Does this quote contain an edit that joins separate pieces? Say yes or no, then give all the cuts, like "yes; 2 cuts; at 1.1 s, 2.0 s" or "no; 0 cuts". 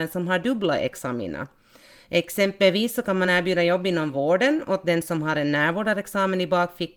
no; 0 cuts